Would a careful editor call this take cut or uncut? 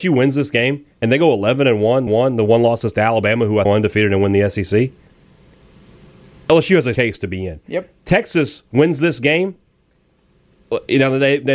cut